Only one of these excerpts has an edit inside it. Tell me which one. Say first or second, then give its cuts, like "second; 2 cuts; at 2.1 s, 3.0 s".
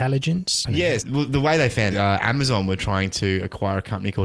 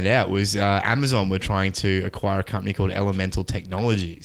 first; 2 cuts; at 1.0 s, 1.9 s